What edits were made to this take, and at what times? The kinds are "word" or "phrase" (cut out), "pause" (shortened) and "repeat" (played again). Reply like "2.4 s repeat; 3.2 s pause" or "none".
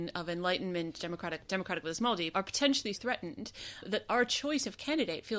1.5 s word; 2.3 s word; 2.9 s word